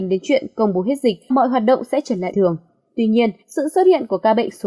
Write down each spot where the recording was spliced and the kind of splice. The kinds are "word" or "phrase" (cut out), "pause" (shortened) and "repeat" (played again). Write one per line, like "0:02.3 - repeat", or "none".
0:01.3 - word
0:02.3 - word
0:03.4 - pause